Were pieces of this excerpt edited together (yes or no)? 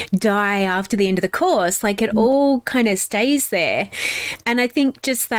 no